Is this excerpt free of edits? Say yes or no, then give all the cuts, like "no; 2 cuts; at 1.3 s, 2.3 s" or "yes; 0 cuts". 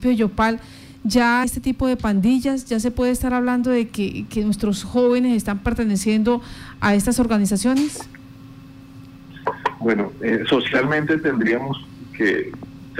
no; 1 cut; at 1.4 s